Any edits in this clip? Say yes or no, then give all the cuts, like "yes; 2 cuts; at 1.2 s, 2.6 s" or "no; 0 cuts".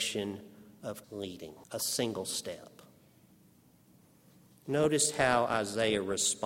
yes; 2 cuts; at 1.0 s, 1.6 s